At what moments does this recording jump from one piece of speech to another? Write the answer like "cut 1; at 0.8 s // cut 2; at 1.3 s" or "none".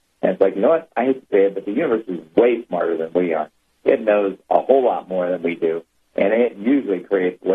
none